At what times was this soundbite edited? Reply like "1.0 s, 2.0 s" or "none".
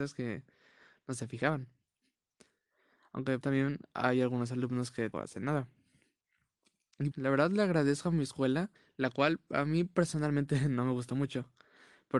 3.4 s, 5.1 s, 7.1 s, 8.8 s